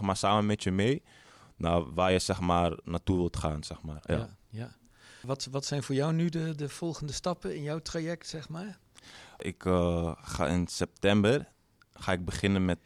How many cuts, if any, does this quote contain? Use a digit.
0